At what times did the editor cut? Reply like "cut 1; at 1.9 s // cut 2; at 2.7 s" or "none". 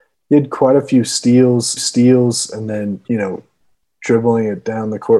cut 1; at 1.8 s // cut 2; at 3.0 s